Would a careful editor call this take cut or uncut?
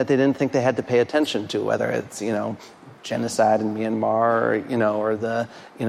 uncut